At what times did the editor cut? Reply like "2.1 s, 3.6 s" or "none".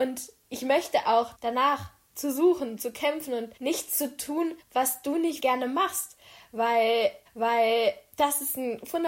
1.3 s, 2.8 s, 3.6 s, 4.6 s, 5.4 s, 7.3 s